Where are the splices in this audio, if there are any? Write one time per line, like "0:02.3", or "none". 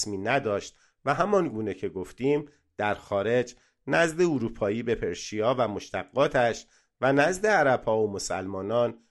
none

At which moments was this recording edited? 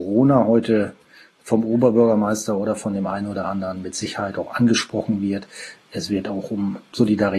none

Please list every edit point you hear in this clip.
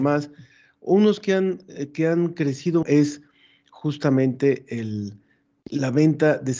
0:02.8

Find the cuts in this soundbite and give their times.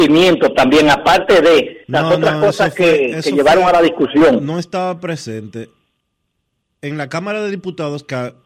0:01.8

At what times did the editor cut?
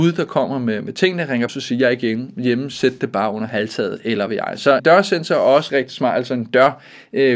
0:01.5
0:04.3
0:04.8
0:05.7

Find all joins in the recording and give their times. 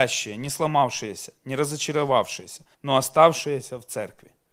0:02.7

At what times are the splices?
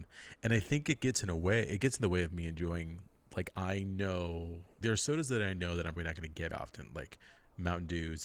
0:03.5
0:04.8
0:06.0
0:06.5

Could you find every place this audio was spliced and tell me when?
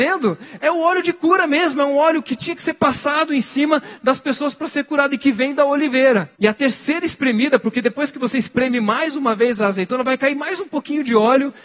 0:06.4

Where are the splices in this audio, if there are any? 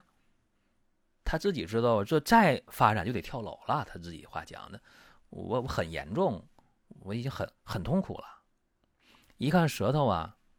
0:07.6

